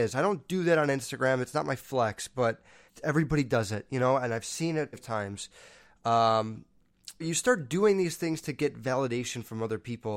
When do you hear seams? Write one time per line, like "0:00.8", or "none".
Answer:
0:02.9
0:04.9
0:07.2